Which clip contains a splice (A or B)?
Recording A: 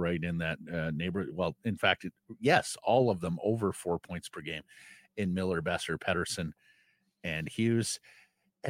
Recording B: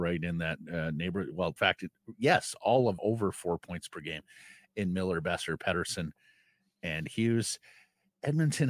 B